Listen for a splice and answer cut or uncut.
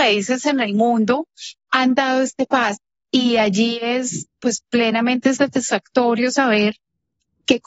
uncut